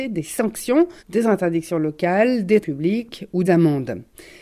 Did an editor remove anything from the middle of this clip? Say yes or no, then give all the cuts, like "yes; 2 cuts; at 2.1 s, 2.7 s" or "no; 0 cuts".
yes; 3 cuts; at 1.0 s, 2.6 s, 3.4 s